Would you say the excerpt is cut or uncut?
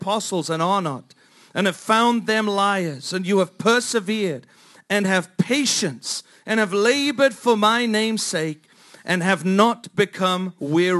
uncut